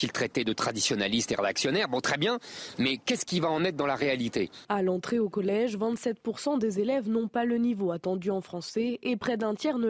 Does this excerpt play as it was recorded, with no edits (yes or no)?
yes